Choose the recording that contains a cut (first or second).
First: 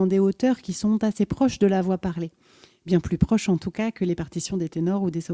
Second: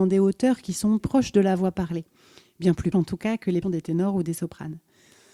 second